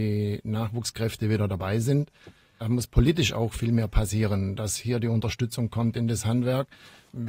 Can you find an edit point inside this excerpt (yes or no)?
no